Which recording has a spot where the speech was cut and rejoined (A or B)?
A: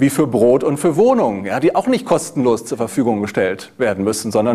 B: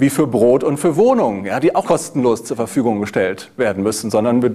B